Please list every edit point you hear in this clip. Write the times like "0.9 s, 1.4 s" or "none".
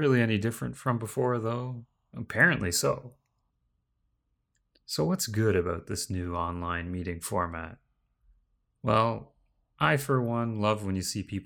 none

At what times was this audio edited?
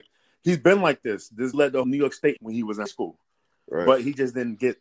1.5 s, 1.8 s, 2.4 s, 2.9 s

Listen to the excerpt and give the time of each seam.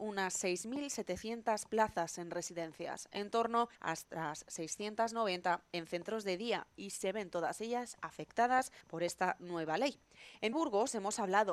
3.7 s, 8.8 s, 10.5 s

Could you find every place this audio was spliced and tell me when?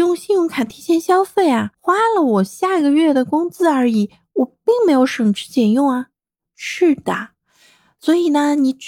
1.7 s

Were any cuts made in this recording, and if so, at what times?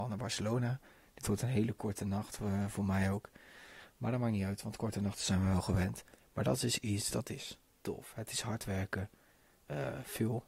6.1 s

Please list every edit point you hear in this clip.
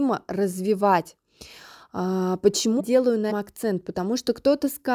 2.8 s, 3.3 s

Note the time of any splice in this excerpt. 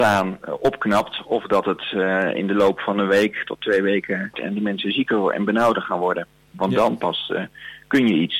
4.3 s

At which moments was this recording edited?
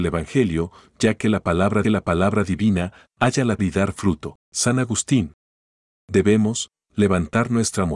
1.8 s, 3.6 s, 4.4 s, 6.8 s

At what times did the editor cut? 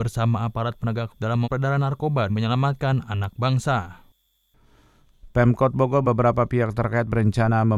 1.1 s, 1.4 s, 2.3 s, 6.0 s

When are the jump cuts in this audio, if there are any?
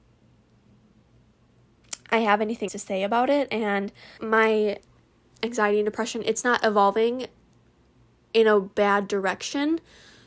2.7 s, 4.2 s

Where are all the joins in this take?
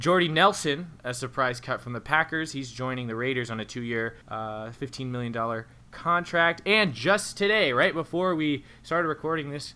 4.2 s

